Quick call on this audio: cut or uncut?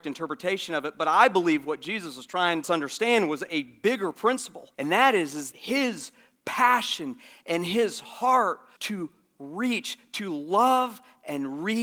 cut